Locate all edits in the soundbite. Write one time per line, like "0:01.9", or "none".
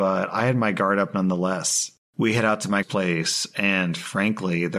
0:02.8